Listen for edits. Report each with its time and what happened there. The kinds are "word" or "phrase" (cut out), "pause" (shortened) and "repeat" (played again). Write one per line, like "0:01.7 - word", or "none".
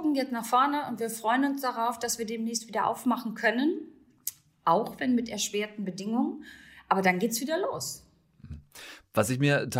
none